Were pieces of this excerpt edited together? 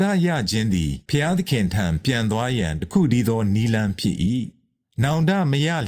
yes; 1 cut; at 1.1 s

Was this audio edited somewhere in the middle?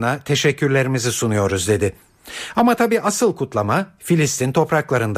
no; 0 cuts

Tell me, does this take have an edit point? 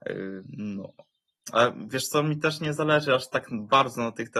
no; 0 cuts

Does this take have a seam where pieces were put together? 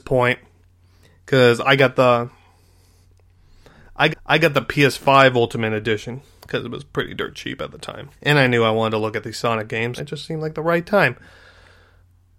yes; 3 cuts; at 4.1 s, 8.2 s, 10.0 s

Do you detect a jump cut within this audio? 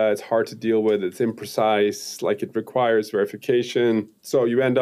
no; 0 cuts

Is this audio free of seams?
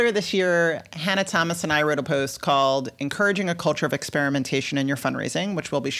no; 1 cut; at 2.0 s

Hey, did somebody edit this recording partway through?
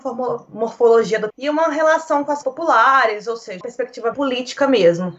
yes; 4 cuts; at 1.3 s, 2.4 s, 3.6 s, 4.1 s

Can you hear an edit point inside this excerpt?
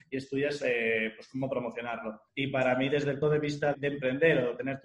yes; 3 cuts; at 2.3 s, 3.2 s, 3.7 s

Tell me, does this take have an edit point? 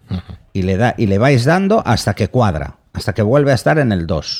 no; 0 cuts

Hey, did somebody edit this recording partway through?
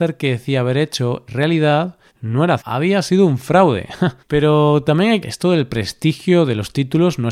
yes; 5 cuts; at 1.3 s, 2.1 s, 2.6 s, 4.2 s, 5.2 s

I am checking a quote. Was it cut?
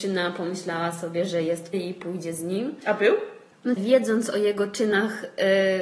yes; 2 cuts; at 1.7 s, 3.8 s

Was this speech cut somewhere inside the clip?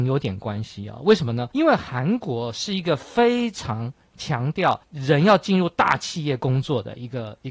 yes; 2 cuts; at 1.5 s, 4.8 s

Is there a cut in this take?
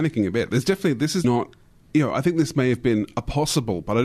yes; 1 cut; at 1.2 s

